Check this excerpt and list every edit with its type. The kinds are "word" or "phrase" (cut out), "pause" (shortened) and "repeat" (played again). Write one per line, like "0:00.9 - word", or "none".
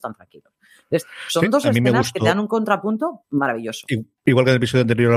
0:03.2 - word
0:04.2 - pause